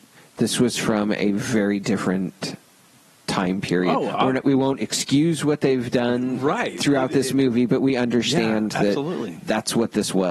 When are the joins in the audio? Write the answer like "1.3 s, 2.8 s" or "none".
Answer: none